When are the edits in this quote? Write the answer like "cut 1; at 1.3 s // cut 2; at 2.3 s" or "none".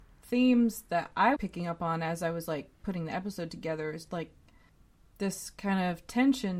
cut 1; at 1.4 s // cut 2; at 4.1 s